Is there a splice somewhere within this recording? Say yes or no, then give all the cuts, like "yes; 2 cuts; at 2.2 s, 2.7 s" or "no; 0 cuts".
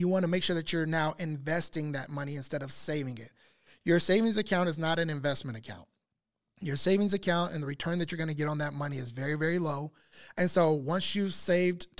no; 0 cuts